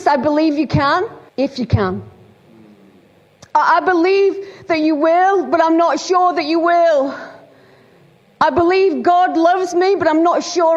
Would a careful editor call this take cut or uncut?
cut